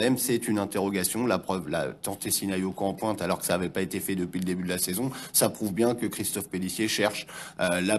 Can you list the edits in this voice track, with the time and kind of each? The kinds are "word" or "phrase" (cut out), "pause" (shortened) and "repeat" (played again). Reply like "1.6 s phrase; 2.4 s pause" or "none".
none

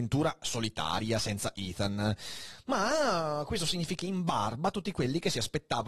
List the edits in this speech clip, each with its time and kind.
4.0 s word

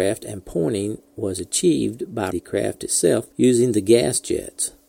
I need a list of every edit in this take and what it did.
2.3 s word; 3.3 s pause

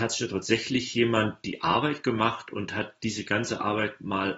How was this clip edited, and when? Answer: none

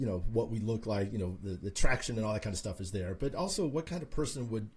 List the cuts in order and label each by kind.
none

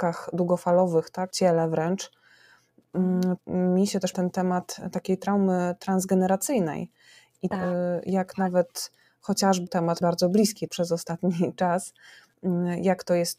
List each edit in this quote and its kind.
1.3 s word; 3.4 s word; 4.1 s word; 7.5 s word; 9.7 s word; 10.0 s word; 10.7 s word

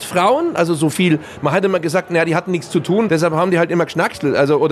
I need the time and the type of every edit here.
none

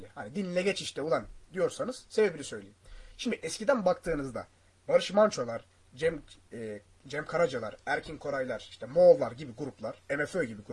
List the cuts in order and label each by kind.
none

